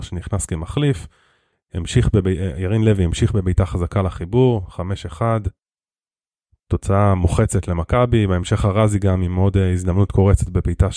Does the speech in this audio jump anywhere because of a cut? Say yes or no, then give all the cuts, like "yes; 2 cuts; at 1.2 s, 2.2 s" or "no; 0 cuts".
no; 0 cuts